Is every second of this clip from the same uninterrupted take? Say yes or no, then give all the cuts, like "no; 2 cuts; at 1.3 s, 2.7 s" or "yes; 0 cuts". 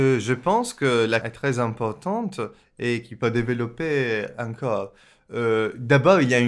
no; 2 cuts; at 1.2 s, 3.2 s